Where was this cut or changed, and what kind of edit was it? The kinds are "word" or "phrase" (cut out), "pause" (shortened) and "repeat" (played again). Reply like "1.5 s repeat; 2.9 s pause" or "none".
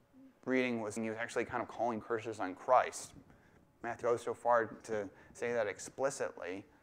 1.0 s word; 2.0 s word; 4.0 s word; 4.8 s word